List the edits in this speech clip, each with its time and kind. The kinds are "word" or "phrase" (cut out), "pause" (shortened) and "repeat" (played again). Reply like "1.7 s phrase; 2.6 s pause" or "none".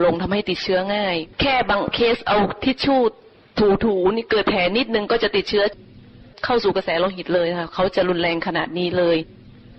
1.3 s pause